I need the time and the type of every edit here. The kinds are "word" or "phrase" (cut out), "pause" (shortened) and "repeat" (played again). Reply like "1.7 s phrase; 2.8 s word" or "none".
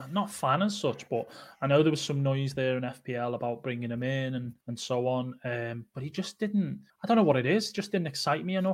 4.6 s pause; 6.9 s pause